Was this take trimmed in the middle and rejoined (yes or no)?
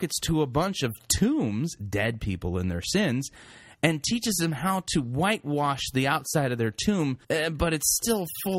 yes